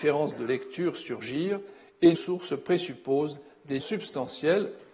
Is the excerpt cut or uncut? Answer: cut